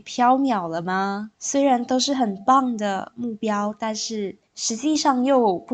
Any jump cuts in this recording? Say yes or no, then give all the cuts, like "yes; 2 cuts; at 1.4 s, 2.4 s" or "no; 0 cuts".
yes; 2 cuts; at 1.3 s, 4.5 s